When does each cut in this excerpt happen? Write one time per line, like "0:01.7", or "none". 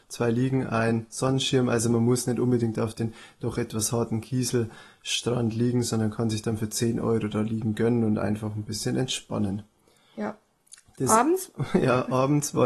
none